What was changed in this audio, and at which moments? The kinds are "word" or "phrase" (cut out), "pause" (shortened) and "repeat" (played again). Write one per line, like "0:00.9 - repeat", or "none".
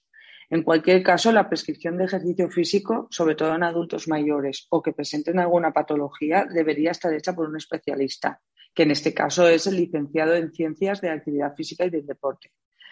none